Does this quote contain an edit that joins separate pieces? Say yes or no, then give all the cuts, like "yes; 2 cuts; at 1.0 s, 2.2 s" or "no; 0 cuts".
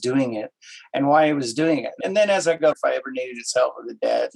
yes; 2 cuts; at 2.0 s, 2.7 s